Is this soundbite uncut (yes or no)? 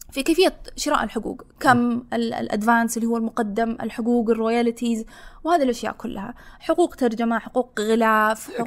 yes